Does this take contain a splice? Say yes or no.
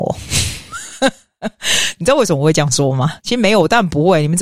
yes